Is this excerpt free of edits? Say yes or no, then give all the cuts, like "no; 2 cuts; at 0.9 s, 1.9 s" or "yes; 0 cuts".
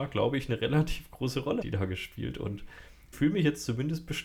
no; 2 cuts; at 1.6 s, 3.1 s